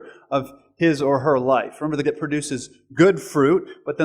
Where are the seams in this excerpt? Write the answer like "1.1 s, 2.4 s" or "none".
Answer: 2.0 s